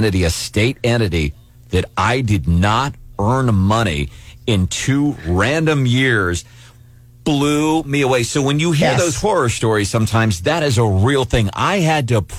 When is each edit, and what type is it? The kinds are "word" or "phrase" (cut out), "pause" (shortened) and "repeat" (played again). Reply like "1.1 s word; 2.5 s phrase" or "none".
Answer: none